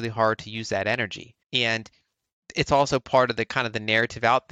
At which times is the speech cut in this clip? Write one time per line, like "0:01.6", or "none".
0:01.4